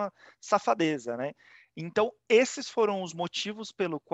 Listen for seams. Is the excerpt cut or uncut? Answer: uncut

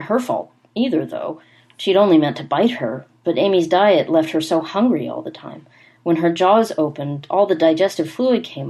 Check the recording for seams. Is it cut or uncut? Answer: uncut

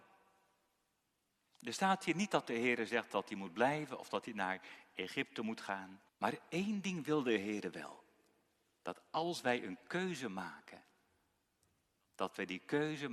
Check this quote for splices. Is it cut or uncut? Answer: cut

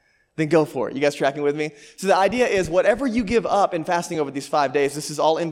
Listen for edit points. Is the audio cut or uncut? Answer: uncut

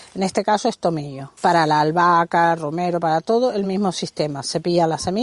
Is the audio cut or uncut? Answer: uncut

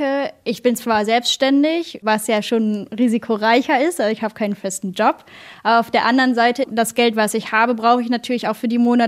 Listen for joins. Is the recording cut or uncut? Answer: uncut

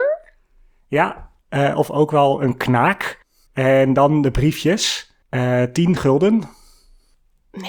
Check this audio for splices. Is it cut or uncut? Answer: cut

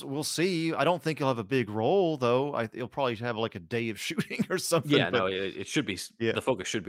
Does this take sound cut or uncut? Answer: uncut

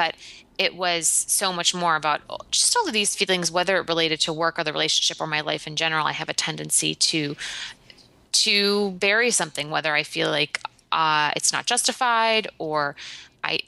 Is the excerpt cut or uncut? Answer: uncut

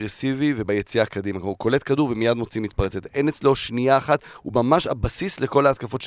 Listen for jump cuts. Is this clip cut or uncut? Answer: uncut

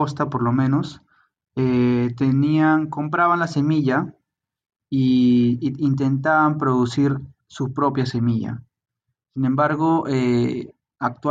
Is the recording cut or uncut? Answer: uncut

